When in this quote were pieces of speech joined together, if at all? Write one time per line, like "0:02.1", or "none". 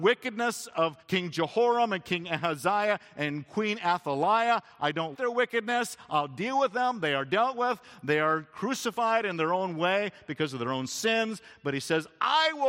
0:01.0
0:05.1